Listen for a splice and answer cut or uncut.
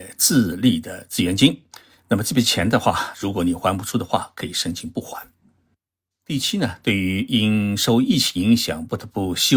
cut